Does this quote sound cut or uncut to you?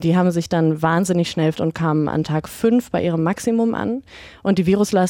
cut